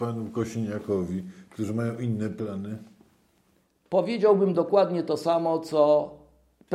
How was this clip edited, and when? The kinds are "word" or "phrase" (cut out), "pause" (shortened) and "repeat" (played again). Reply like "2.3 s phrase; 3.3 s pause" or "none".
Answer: none